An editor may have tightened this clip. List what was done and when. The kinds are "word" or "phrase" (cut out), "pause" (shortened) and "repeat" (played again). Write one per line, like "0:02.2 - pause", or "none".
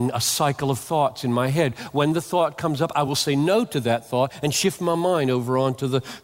none